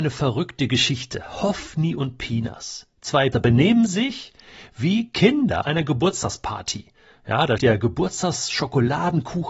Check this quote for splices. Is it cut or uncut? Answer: cut